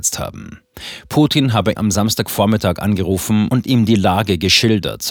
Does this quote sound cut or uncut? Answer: cut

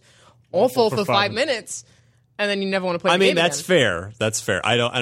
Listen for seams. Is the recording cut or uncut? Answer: uncut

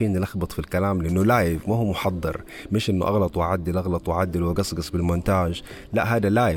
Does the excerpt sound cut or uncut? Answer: uncut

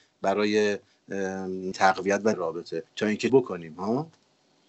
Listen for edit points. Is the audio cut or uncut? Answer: cut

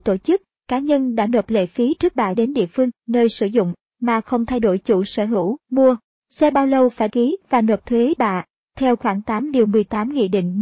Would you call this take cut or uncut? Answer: cut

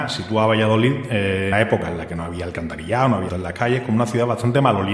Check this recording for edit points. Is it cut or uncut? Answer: cut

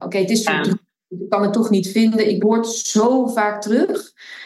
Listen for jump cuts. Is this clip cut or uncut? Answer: cut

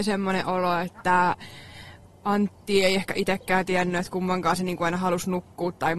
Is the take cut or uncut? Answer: uncut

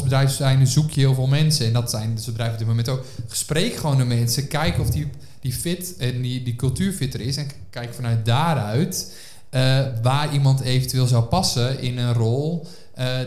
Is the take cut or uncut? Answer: uncut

